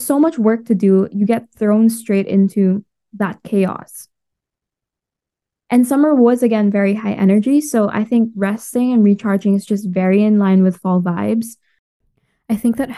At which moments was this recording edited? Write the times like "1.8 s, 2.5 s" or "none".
none